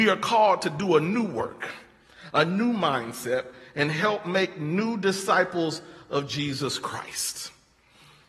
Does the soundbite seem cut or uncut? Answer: uncut